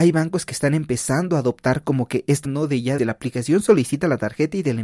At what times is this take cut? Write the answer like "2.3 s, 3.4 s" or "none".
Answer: 2.4 s, 3.0 s